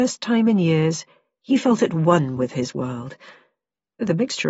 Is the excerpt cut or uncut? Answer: uncut